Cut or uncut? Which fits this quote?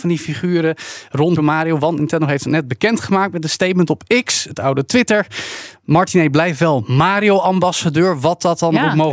cut